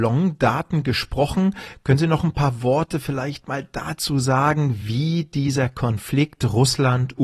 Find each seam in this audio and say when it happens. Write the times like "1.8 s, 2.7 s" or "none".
none